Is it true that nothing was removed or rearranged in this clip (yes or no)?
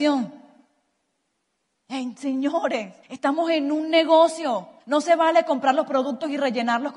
no